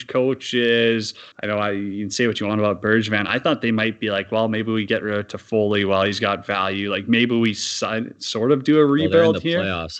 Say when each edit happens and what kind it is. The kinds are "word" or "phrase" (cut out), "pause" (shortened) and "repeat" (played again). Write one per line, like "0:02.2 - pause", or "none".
0:01.3 - pause